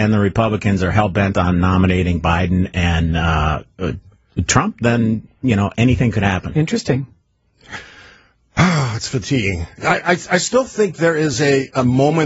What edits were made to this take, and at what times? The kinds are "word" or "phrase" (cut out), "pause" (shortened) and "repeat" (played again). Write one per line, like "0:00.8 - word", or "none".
none